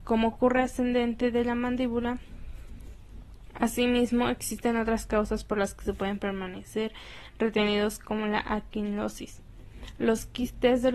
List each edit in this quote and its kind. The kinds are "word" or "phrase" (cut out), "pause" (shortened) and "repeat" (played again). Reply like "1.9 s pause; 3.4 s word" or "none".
none

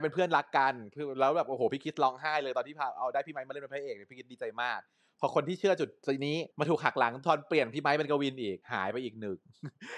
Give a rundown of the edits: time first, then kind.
6.5 s pause; 8.6 s pause

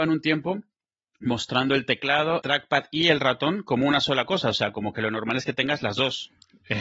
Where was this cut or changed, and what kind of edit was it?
2.4 s word

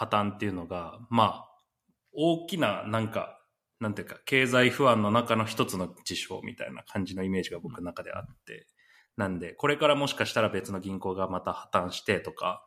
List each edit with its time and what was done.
none

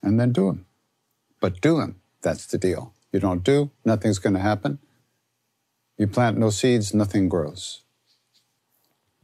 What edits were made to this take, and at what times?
none

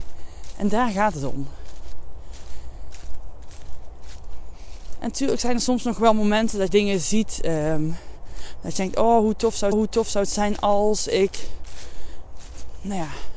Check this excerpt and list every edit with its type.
6.7 s word; 9.7 s repeat

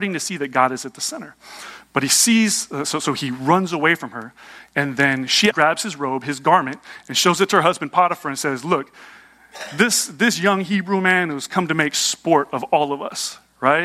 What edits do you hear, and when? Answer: 5.5 s word

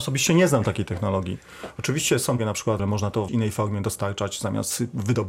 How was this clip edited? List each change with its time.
2.4 s word; 2.8 s word; 3.3 s word

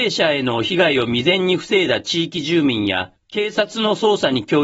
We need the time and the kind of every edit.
3.2 s pause

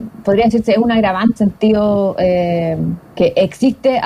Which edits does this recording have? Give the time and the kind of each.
1.4 s phrase; 3.1 s pause

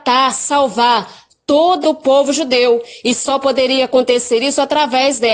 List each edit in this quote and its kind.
1.8 s phrase

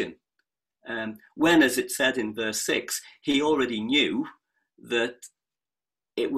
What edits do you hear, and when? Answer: none

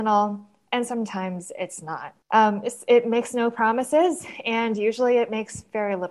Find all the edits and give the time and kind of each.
2.2 s pause

